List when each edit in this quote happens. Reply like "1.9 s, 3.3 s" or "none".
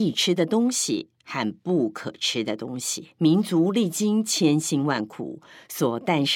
3.1 s